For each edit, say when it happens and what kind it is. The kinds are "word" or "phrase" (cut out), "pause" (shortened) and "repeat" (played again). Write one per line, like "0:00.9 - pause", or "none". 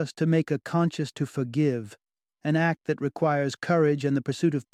0:01.1 - word